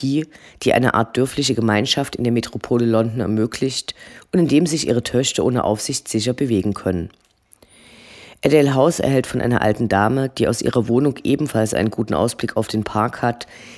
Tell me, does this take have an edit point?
no; 0 cuts

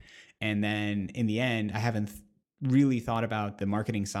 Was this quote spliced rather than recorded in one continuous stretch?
no; 0 cuts

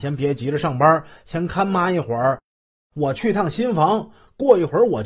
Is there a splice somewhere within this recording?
no; 0 cuts

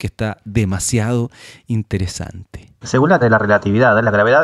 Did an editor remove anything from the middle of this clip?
yes; 1 cut; at 3.2 s

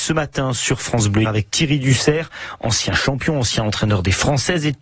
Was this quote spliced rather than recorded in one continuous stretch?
yes; 1 cut; at 1.2 s

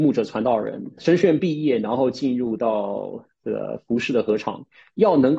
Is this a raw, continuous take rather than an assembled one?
no; 1 cut; at 1.0 s

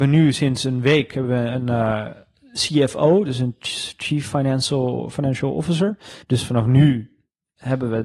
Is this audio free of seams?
no; 1 cut; at 6.2 s

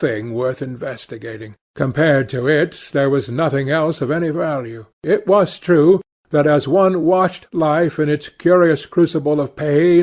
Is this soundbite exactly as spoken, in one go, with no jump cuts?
no; 2 cuts; at 1.6 s, 4.9 s

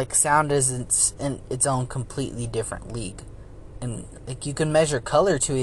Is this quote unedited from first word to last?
yes; 0 cuts

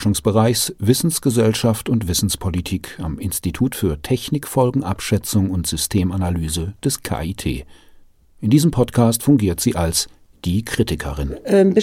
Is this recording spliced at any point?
no; 0 cuts

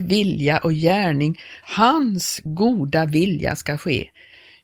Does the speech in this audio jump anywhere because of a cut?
yes; 1 cut; at 1.6 s

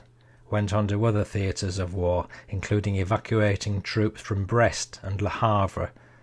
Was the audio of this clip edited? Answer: no; 0 cuts

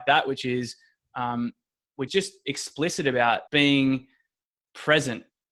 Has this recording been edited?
yes; 2 cuts; at 2.1 s, 3.5 s

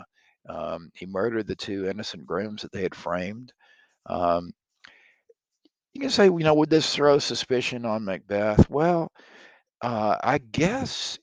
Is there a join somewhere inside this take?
no; 0 cuts

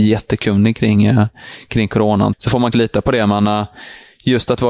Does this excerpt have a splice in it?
yes; 2 cuts; at 2.3 s, 2.7 s

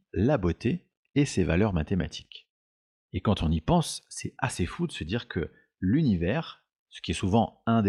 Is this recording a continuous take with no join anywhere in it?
yes; 0 cuts

